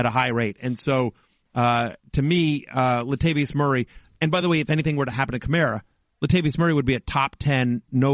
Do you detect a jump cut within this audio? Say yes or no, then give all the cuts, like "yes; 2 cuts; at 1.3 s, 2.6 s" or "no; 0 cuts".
no; 0 cuts